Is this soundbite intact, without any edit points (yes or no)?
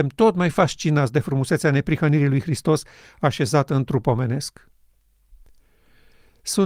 yes